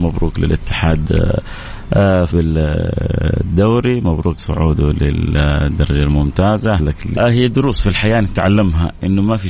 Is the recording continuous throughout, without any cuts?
no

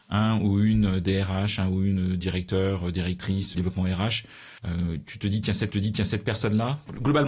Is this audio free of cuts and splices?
no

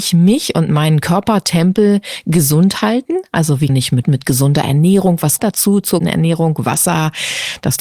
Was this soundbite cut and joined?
yes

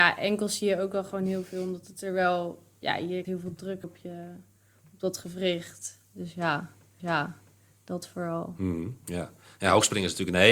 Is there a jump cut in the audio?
yes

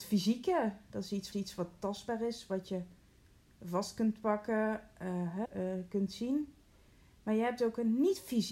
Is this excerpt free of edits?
no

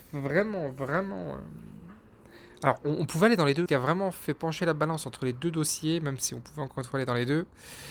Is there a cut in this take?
yes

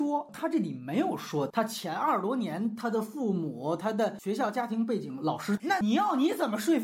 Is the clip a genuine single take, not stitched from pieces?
yes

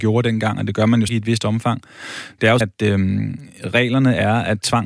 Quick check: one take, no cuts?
no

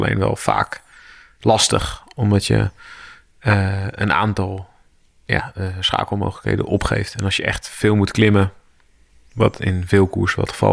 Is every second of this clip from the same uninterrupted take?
yes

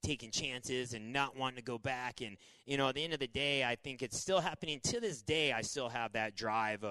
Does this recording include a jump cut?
no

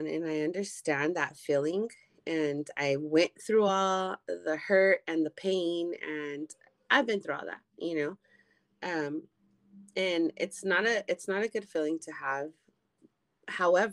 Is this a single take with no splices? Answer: yes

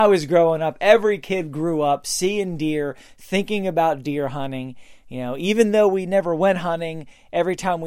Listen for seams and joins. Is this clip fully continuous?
yes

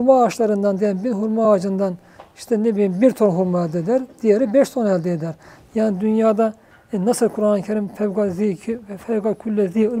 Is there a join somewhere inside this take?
no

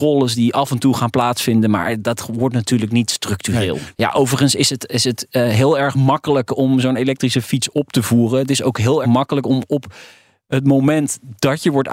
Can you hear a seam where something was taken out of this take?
yes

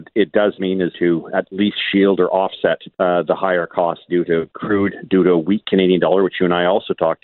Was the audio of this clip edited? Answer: yes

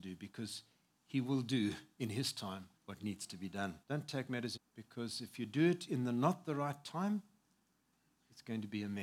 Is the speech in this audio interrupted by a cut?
yes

